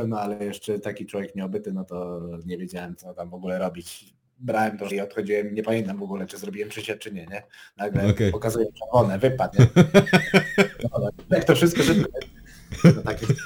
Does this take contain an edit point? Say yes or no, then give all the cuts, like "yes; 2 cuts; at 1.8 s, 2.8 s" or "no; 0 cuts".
yes; 4 cuts; at 3.0 s, 4.9 s, 9.5 s, 12.0 s